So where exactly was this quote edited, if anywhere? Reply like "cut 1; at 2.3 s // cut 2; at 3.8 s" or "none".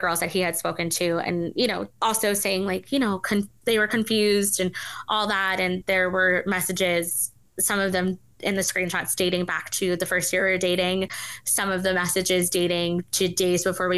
none